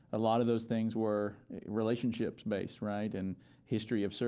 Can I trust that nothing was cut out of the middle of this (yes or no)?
yes